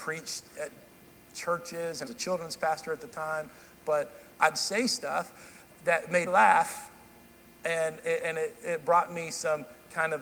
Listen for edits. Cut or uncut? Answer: cut